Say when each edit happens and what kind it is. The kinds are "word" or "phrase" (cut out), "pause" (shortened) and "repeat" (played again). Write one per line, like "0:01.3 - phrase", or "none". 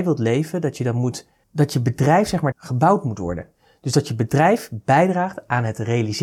0:02.5 - word